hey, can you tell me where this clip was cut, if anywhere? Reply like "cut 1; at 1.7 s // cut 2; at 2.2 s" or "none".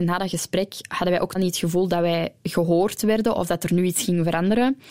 cut 1; at 1.3 s // cut 2; at 2.4 s